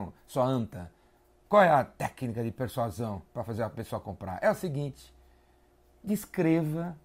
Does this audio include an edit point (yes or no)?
no